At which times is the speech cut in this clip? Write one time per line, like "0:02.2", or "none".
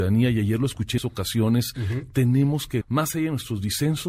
0:01.0
0:02.8